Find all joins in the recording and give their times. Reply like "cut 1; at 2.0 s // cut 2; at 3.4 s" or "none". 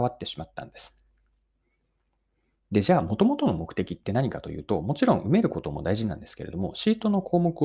none